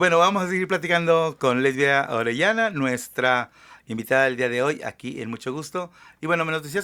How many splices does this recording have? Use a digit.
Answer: 0